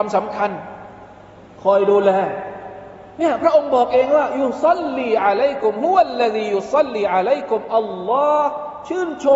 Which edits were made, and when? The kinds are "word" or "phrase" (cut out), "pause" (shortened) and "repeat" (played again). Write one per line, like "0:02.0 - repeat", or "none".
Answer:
none